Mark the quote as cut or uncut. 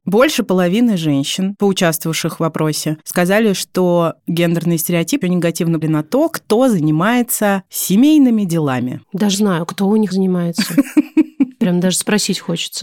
cut